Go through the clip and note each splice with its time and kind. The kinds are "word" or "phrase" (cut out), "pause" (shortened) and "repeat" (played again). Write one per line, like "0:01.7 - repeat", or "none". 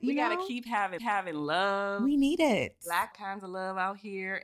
0:01.0 - repeat
0:03.1 - phrase